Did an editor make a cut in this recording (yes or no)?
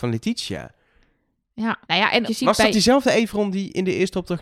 yes